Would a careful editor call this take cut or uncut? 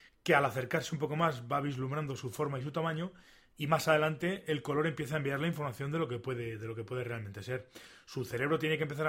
uncut